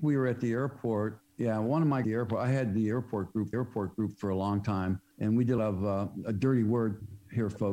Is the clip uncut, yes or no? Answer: no